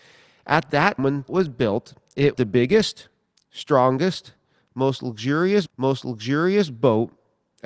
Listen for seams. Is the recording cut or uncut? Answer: cut